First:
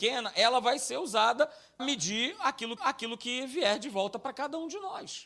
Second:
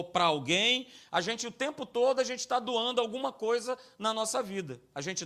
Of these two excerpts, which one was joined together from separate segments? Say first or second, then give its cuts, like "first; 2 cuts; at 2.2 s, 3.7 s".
first; 2 cuts; at 1.8 s, 2.8 s